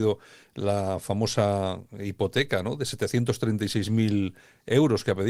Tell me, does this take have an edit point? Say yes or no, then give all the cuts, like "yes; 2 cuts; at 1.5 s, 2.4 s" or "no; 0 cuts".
no; 0 cuts